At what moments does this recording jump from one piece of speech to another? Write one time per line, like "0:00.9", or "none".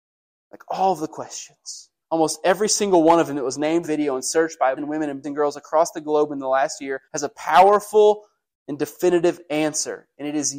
0:02.0
0:03.8
0:04.8
0:05.2
0:07.0
0:08.4